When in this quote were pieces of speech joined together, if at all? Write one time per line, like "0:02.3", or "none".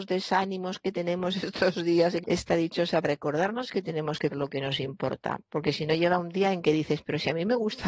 0:02.2
0:03.0
0:04.3